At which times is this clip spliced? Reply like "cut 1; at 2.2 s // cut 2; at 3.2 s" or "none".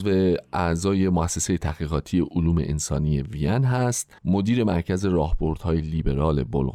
cut 1; at 4.2 s